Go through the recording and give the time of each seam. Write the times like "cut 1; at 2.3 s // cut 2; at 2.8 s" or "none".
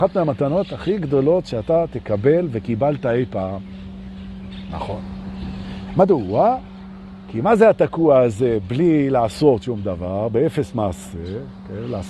none